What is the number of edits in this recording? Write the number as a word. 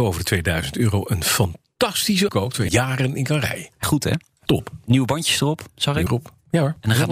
five